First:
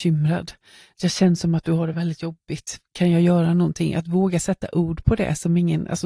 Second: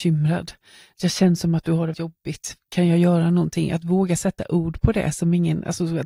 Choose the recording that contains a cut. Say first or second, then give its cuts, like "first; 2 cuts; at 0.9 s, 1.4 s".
second; 1 cut; at 1.9 s